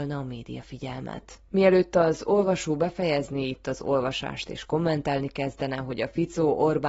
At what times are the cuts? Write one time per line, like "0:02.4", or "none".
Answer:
0:01.5